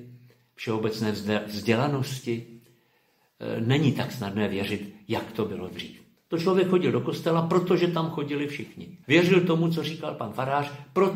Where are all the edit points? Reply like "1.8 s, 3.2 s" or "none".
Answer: 6.2 s, 9.0 s